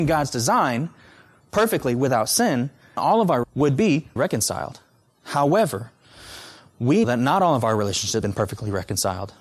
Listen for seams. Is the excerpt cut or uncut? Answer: cut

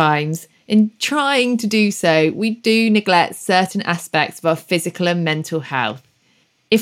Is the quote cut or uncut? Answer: uncut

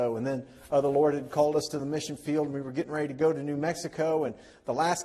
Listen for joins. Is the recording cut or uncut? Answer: uncut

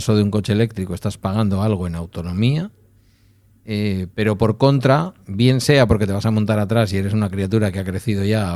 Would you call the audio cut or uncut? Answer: cut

